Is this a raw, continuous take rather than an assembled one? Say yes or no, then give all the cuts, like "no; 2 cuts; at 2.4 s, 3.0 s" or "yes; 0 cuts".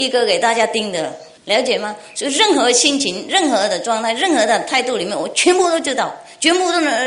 no; 1 cut; at 1.4 s